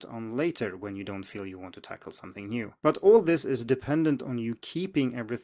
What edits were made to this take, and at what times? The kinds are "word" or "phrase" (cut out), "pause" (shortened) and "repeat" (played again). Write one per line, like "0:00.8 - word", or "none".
0:02.8 - pause